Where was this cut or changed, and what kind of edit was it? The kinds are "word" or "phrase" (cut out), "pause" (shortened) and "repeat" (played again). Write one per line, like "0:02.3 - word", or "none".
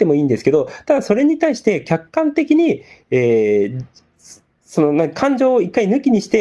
none